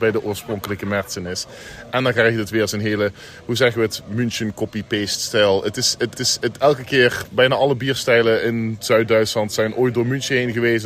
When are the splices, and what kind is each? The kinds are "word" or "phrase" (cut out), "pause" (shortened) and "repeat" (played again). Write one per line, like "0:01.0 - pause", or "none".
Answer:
0:06.2 - repeat